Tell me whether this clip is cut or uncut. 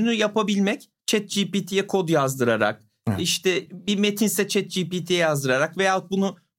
cut